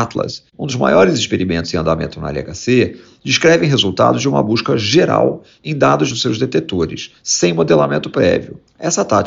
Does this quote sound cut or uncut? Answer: cut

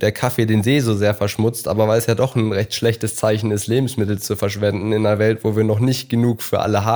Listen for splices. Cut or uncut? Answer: uncut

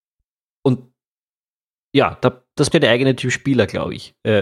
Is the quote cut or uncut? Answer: cut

